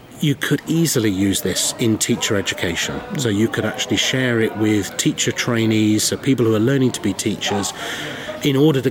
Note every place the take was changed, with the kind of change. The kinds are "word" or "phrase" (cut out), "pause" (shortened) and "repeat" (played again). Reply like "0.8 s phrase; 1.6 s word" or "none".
none